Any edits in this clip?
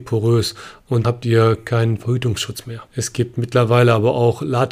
yes; 2 cuts; at 1.0 s, 2.9 s

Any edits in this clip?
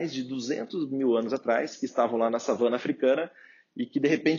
no; 0 cuts

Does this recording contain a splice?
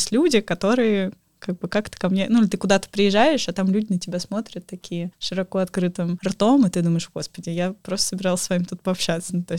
no; 0 cuts

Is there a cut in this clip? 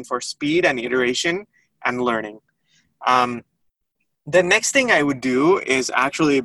no; 0 cuts

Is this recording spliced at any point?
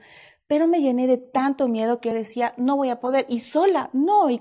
no; 0 cuts

